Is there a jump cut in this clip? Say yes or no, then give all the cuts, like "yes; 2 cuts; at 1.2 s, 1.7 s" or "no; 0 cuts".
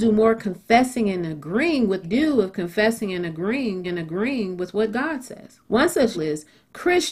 yes; 4 cuts; at 2.0 s, 3.8 s, 5.6 s, 6.1 s